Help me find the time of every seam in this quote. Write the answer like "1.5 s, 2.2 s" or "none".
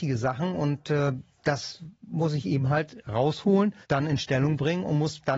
3.8 s